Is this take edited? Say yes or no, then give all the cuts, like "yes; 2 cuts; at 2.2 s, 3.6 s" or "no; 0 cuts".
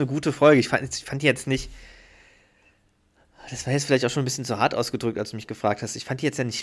no; 0 cuts